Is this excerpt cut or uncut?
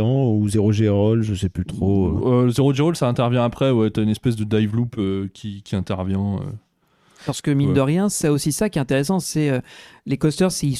uncut